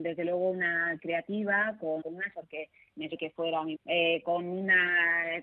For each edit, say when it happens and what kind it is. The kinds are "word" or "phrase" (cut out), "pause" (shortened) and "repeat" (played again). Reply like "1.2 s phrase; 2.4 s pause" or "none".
1.0 s word; 2.0 s word; 2.3 s word; 3.1 s word; 3.7 s word

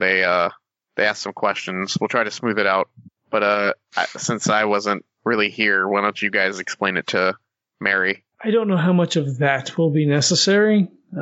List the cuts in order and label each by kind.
8.3 s pause

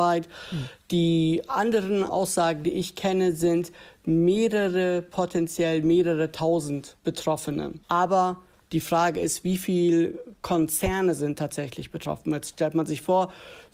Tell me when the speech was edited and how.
none

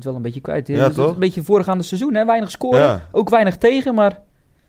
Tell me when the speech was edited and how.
none

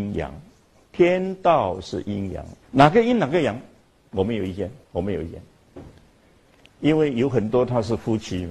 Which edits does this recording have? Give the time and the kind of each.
2.6 s pause; 4.8 s pause

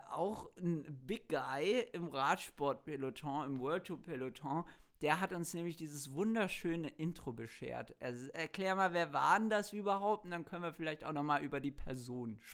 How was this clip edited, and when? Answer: none

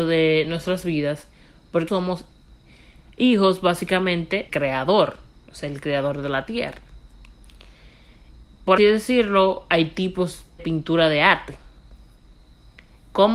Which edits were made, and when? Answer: 1.9 s word; 4.5 s word; 8.8 s word; 10.6 s word

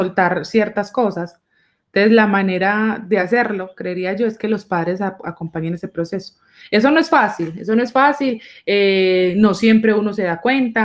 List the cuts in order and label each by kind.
none

